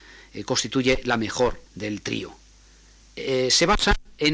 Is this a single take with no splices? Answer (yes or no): no